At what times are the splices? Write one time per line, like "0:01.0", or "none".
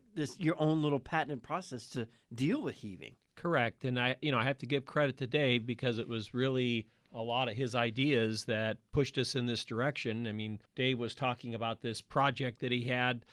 0:10.7